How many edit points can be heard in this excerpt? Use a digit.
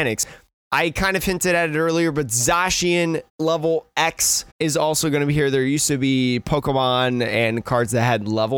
2